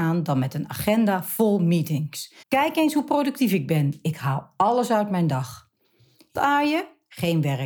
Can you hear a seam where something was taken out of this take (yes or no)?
yes